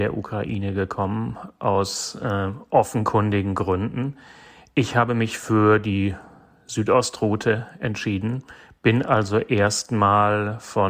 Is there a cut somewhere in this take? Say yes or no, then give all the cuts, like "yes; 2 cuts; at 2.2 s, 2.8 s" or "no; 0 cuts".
no; 0 cuts